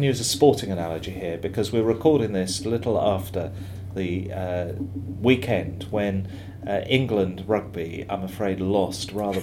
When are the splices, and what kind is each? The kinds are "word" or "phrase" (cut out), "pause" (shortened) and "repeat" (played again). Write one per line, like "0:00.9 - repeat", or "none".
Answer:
none